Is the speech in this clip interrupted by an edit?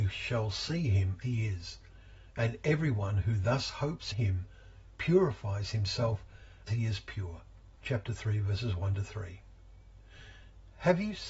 yes; 4 cuts; at 1.2 s, 4.1 s, 6.7 s, 7.8 s

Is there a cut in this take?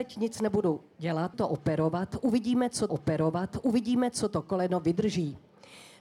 yes; 2 cuts; at 1.3 s, 2.9 s

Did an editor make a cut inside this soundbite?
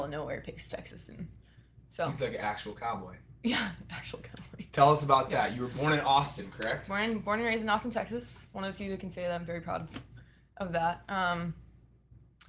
no; 0 cuts

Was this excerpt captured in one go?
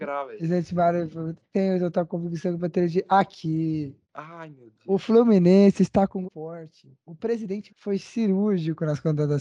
no; 3 cuts; at 4.0 s, 6.2 s, 7.7 s

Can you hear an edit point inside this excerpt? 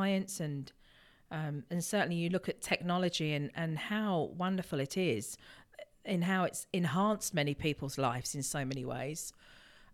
no; 0 cuts

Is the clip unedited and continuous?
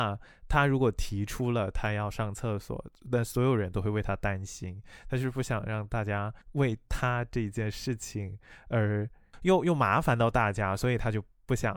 no; 1 cut; at 6.4 s

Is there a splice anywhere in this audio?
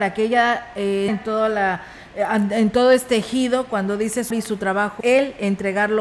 yes; 3 cuts; at 1.1 s, 4.3 s, 5.0 s

